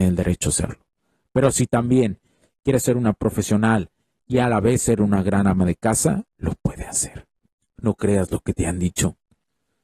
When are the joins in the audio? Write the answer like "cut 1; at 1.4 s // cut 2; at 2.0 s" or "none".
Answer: none

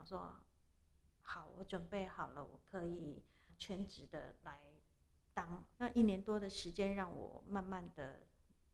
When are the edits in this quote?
cut 1; at 3.5 s // cut 2; at 5.7 s

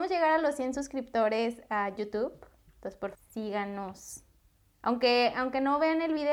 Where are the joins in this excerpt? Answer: cut 1; at 2.0 s // cut 2; at 3.1 s

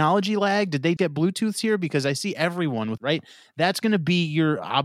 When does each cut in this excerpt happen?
cut 1; at 1.0 s // cut 2; at 3.0 s

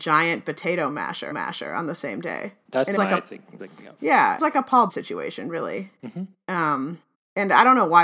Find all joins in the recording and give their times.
cut 1; at 1.3 s // cut 2; at 3.0 s // cut 3; at 3.6 s // cut 4; at 4.4 s // cut 5; at 4.9 s // cut 6; at 7.1 s

